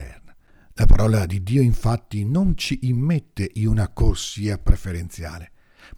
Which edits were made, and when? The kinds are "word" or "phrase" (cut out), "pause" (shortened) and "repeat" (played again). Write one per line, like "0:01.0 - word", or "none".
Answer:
none

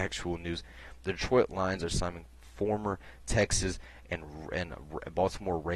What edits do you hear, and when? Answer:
none

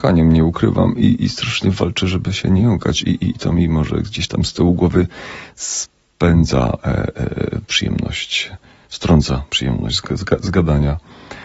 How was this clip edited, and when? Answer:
none

